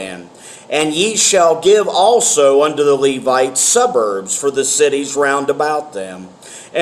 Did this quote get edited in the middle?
no; 0 cuts

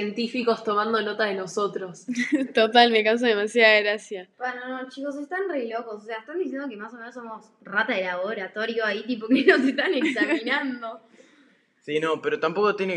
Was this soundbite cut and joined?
no; 0 cuts

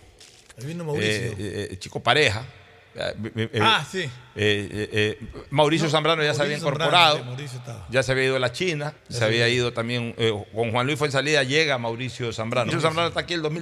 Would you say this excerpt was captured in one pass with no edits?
no; 2 cuts; at 9.0 s, 12.7 s

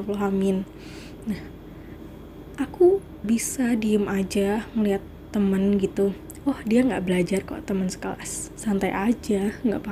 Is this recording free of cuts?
no; 1 cut; at 3.2 s

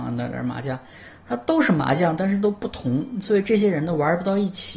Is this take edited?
no; 0 cuts

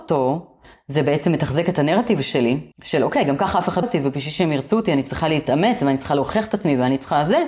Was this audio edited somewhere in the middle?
yes; 2 cuts; at 2.7 s, 3.8 s

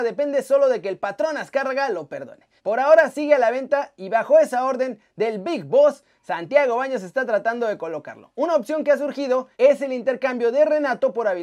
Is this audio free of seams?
no; 2 cuts; at 2.6 s, 9.5 s

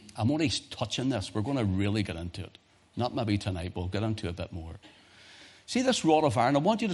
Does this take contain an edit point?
no; 0 cuts

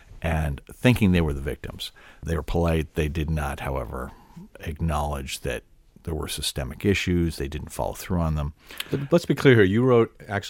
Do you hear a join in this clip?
no; 0 cuts

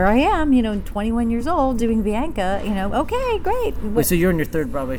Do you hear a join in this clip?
no; 0 cuts

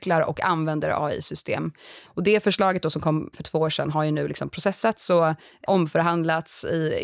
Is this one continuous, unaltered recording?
no; 2 cuts; at 3.3 s, 5.7 s

